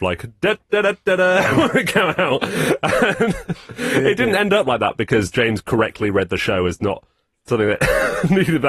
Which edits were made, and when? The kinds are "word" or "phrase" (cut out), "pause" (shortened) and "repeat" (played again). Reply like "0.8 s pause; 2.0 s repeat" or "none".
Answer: none

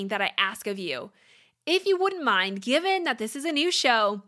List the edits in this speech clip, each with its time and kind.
none

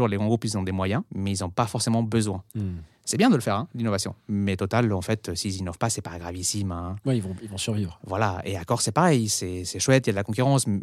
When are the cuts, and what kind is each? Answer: 1.1 s pause; 2.5 s pause

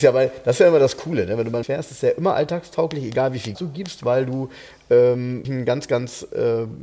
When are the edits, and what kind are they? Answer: 1.6 s word; 3.5 s word; 5.4 s word

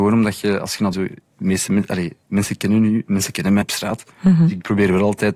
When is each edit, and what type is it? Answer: 0.9 s phrase; 3.6 s word; 4.1 s pause

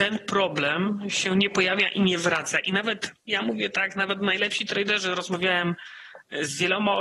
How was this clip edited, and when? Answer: 3.2 s pause

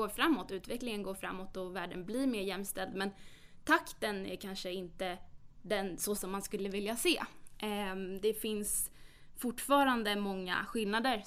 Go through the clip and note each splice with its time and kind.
6.1 s word

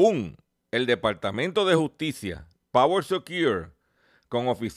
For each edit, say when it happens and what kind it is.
none

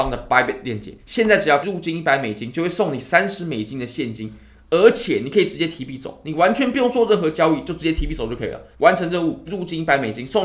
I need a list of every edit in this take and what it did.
1.0 s pause; 1.6 s word; 8.7 s pause; 9.5 s word

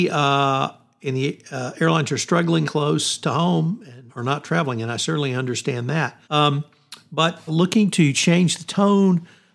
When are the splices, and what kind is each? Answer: 2.6 s phrase; 4.1 s pause; 6.2 s pause; 7.5 s word

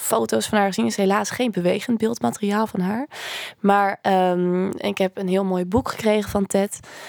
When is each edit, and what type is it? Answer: none

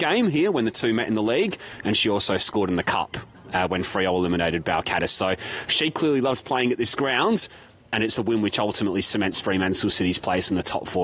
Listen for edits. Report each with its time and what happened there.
none

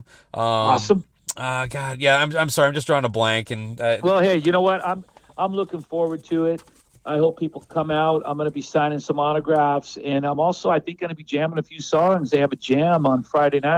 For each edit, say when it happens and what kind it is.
none

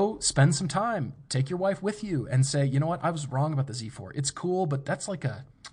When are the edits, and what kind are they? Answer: none

